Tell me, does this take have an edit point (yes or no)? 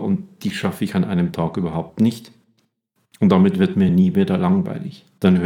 no